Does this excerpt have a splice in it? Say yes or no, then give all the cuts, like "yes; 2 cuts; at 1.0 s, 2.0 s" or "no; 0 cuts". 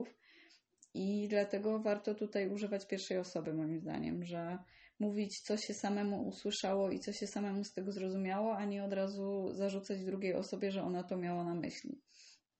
no; 0 cuts